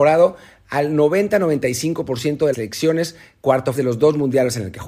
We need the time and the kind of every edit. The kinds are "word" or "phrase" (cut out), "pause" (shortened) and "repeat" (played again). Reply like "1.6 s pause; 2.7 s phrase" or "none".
2.5 s word; 3.7 s word